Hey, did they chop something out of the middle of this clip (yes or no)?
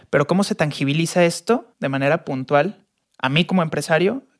yes